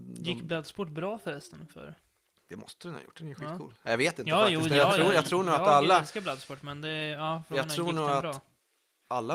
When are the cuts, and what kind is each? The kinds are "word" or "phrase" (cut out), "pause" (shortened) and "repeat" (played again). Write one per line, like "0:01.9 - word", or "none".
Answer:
none